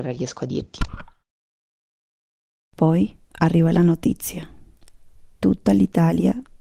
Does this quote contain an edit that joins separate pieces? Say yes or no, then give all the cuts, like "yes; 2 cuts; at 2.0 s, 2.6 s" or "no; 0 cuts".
no; 0 cuts